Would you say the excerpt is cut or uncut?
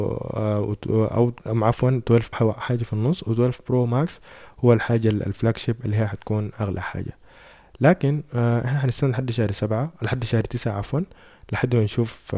cut